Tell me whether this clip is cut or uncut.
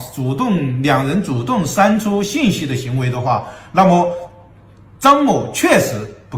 uncut